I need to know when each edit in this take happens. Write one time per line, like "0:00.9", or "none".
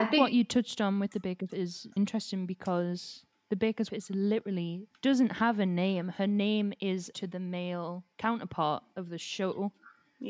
0:01.5
0:02.0
0:03.9
0:04.9
0:07.1
0:08.1